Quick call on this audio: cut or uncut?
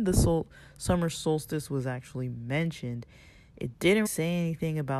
cut